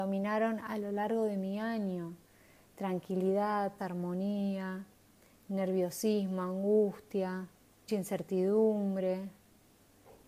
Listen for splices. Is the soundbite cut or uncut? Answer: cut